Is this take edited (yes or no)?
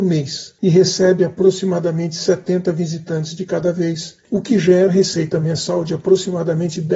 yes